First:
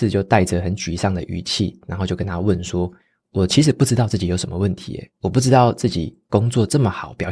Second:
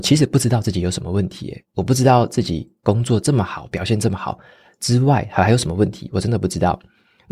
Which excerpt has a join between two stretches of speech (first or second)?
first